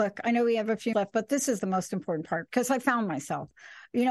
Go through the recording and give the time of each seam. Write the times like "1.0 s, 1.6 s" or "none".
0.9 s, 1.6 s